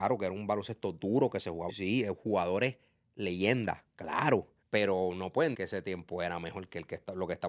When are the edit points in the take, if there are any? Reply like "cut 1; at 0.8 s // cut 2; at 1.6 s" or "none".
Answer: cut 1; at 1.7 s // cut 2; at 4.6 s // cut 3; at 5.5 s